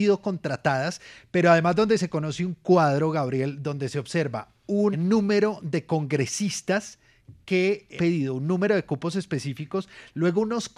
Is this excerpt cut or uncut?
cut